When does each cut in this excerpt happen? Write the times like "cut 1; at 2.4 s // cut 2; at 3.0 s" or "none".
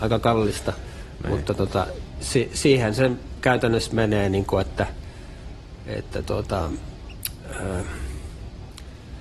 none